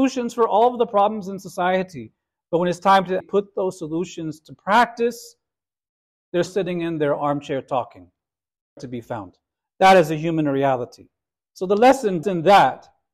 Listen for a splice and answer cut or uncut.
cut